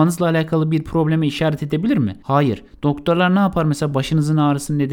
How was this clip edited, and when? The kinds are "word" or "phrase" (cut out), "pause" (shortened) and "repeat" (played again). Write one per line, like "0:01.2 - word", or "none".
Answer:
none

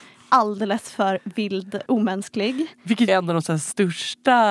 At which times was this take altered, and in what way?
0:01.9 - word
0:03.1 - word

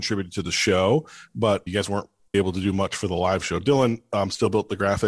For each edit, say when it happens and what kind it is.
0:01.7 - word
0:02.3 - word

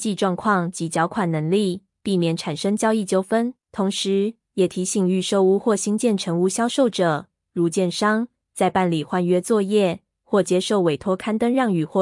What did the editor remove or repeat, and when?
0:03.6 - pause

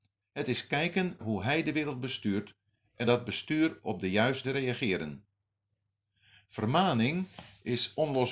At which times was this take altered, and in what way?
0:01.2 - word
0:03.0 - word
0:04.4 - word

